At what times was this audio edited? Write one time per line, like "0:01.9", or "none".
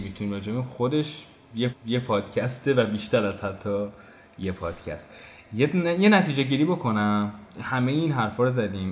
0:01.7
0:07.5